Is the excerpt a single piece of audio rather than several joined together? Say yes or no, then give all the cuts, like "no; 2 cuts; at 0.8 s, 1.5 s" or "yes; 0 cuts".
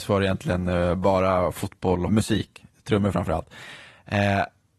no; 1 cut; at 2.1 s